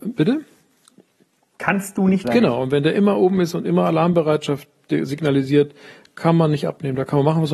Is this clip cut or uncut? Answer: cut